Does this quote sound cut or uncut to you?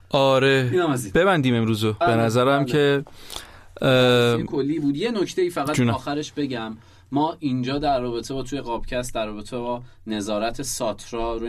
cut